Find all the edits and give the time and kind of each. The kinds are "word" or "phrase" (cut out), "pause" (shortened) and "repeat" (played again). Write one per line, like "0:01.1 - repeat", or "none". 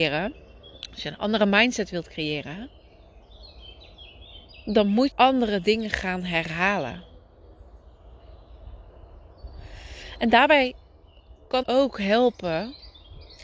0:05.1 - word
0:11.6 - word